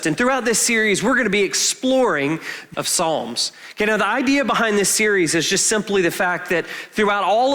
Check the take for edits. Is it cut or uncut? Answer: cut